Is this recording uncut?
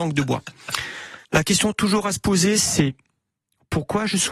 no; 1 cut; at 1.2 s

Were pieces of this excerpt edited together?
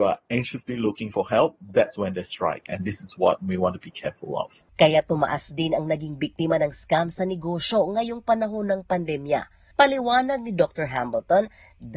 yes; 1 cut; at 4.7 s

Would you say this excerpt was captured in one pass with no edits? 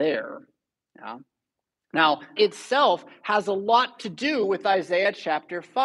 no; 1 cut; at 2.4 s

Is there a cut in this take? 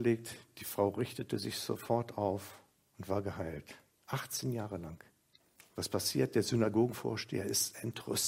yes; 3 cuts; at 2.8 s, 3.9 s, 5.4 s

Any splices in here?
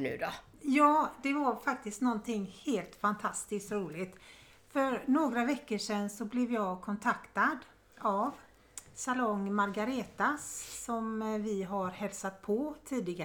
no; 0 cuts

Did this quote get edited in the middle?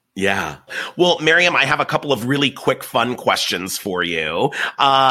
no; 0 cuts

